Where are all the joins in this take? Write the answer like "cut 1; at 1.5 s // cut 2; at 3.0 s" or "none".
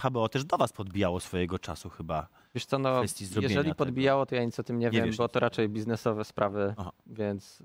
cut 1; at 2.5 s